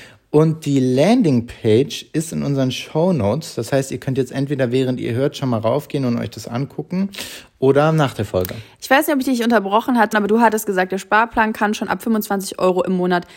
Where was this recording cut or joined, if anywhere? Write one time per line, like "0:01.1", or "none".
0:10.1